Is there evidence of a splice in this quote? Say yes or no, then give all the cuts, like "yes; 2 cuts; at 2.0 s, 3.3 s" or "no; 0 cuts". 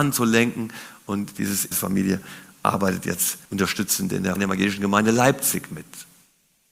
yes; 3 cuts; at 1.7 s, 3.4 s, 4.4 s